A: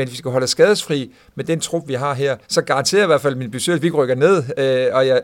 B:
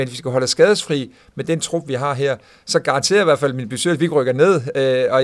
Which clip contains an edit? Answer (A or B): A